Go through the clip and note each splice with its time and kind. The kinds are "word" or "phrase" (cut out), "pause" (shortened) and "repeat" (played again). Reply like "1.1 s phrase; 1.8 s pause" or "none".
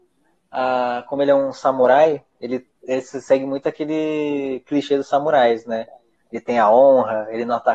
2.7 s pause